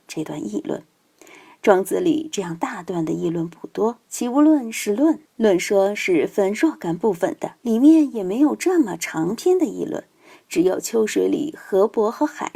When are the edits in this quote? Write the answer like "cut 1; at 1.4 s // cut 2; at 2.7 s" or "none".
cut 1; at 4.0 s // cut 2; at 5.3 s // cut 3; at 7.6 s